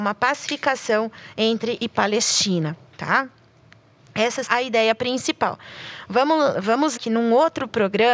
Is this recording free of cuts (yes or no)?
no